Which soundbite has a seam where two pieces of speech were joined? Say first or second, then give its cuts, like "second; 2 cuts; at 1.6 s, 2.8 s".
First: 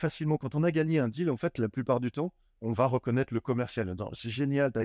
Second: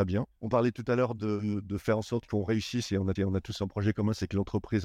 second; 1 cut; at 3.2 s